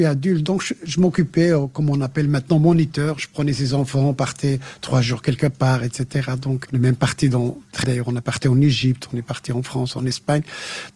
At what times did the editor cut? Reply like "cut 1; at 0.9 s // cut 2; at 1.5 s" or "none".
cut 1; at 6.6 s // cut 2; at 7.8 s